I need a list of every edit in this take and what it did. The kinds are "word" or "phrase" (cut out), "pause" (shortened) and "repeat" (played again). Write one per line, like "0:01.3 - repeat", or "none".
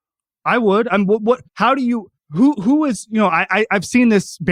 0:01.5 - pause
0:02.2 - pause

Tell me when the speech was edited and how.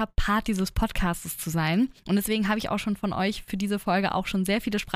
0:02.0 - pause

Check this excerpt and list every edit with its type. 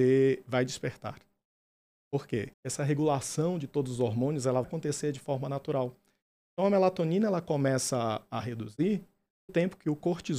0:02.5 - pause
0:04.6 - word
0:09.5 - word

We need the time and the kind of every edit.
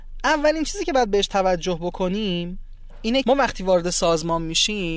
0:03.2 - word

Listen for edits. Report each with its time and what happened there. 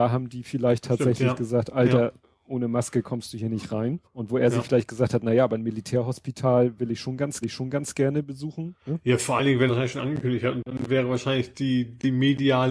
0:04.0 - pause
0:07.4 - repeat
0:09.7 - word

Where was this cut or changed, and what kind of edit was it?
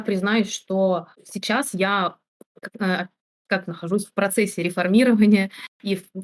0:01.1 - pause
0:03.7 - phrase

